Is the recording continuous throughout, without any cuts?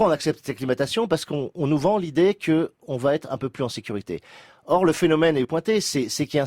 no; 1 cut; at 5.4 s

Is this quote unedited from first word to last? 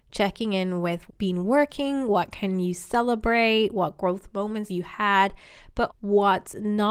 no; 3 cuts; at 1.1 s, 4.7 s, 5.9 s

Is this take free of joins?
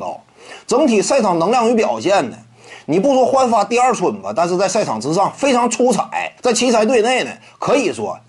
no; 1 cut; at 6.4 s

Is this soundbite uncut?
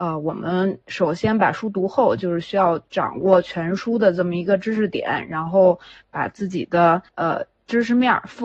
no; 1 cut; at 7.1 s

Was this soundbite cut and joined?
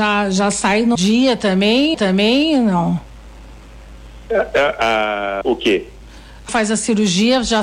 yes; 4 cuts; at 1.0 s, 1.9 s, 5.4 s, 6.5 s

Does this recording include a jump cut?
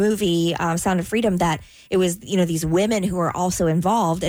no; 0 cuts

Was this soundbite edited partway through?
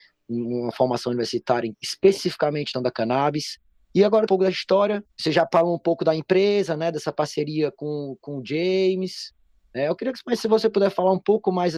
yes; 4 cuts; at 1.7 s, 2.7 s, 4.3 s, 5.1 s

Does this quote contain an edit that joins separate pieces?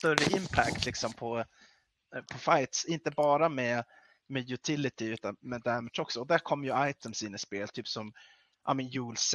no; 0 cuts

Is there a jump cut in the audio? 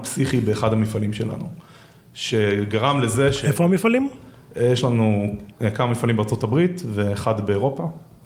no; 0 cuts

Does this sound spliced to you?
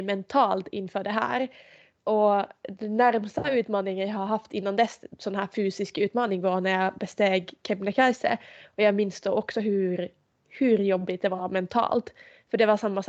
no; 0 cuts

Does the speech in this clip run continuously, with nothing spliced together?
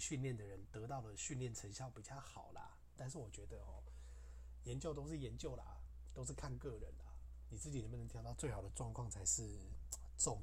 no; 1 cut; at 3.0 s

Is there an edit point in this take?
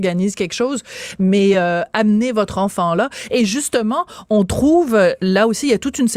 no; 0 cuts

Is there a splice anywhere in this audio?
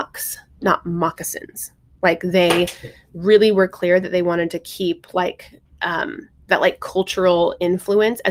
no; 0 cuts

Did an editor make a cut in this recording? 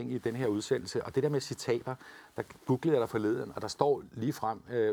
no; 0 cuts

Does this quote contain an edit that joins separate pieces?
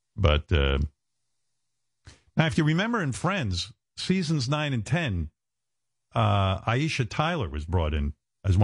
no; 0 cuts

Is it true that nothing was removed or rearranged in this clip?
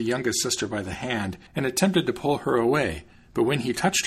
no; 2 cuts; at 1.5 s, 3.1 s

